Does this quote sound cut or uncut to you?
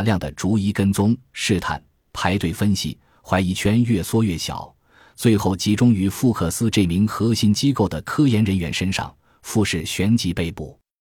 uncut